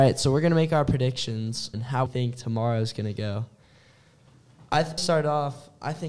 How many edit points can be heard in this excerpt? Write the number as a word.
three